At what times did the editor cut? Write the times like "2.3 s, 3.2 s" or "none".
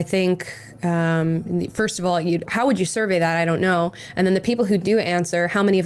2.5 s